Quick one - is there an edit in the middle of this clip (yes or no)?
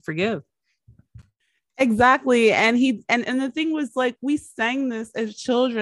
no